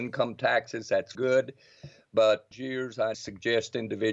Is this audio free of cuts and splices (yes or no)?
no